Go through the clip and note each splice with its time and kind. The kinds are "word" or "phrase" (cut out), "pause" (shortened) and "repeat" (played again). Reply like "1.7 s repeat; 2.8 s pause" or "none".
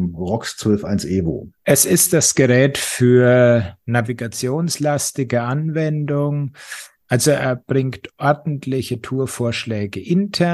1.6 s pause